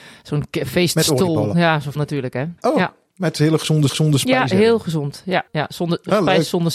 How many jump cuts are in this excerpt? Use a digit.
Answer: 4